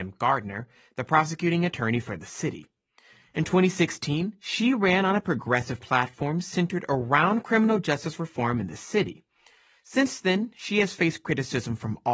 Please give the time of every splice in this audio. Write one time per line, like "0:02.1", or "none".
none